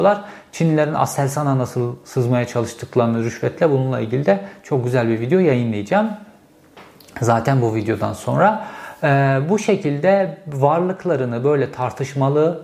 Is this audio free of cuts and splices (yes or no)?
yes